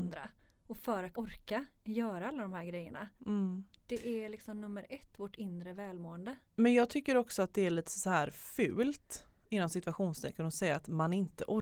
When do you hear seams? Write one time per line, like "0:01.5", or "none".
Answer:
0:01.1
0:03.2